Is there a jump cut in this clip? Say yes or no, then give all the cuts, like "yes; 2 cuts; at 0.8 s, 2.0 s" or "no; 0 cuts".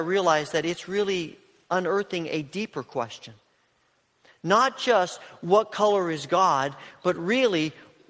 no; 0 cuts